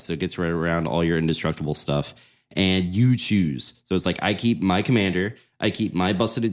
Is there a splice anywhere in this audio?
no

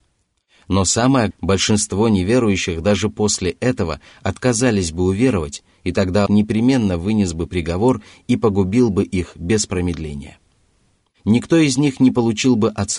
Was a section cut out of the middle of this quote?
yes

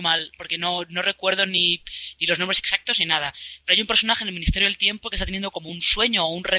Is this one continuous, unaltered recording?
yes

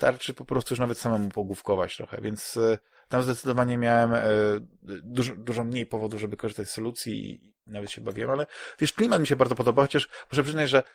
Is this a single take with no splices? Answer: yes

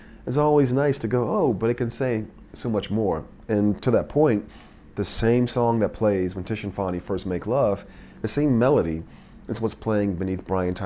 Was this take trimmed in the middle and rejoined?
no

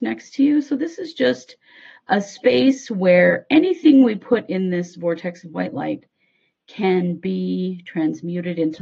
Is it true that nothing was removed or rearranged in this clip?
yes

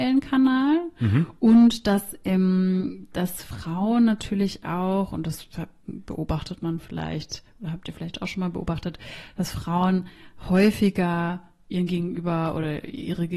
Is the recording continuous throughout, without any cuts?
yes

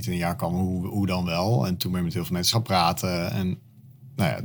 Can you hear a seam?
yes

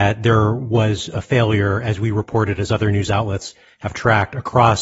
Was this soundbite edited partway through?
no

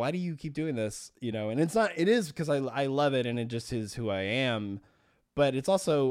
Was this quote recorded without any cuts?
yes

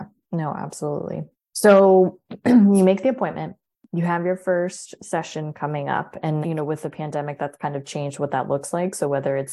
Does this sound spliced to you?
yes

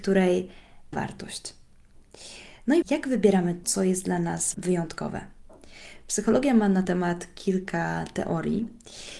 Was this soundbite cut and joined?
yes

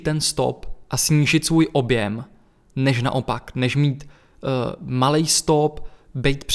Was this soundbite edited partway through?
no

